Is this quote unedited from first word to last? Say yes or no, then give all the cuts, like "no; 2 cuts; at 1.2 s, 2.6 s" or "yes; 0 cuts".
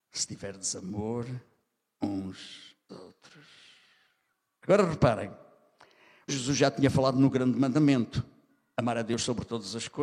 no; 2 cuts; at 2.9 s, 6.3 s